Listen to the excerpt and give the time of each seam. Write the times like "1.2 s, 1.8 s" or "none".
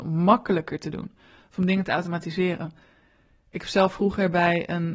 none